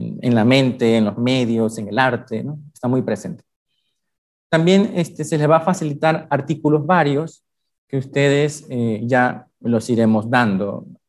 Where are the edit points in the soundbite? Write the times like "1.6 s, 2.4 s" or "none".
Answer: none

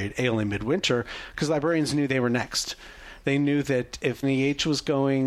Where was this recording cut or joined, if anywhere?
4.2 s

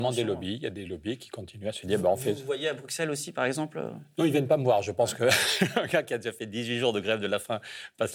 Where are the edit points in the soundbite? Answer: none

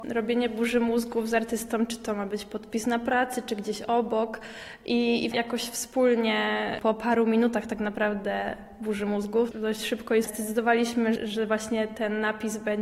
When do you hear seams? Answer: 5.3 s, 10.2 s, 11.2 s

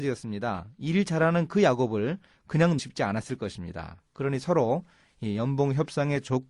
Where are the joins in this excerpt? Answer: 2.8 s

